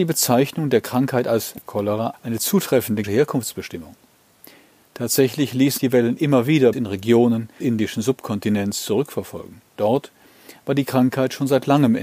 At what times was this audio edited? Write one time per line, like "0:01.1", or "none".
0:01.7
0:02.1
0:03.0
0:05.8
0:06.7
0:07.6